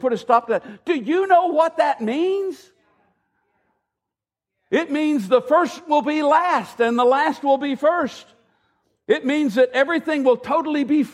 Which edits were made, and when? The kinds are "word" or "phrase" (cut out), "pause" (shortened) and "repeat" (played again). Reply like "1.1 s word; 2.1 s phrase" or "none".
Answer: none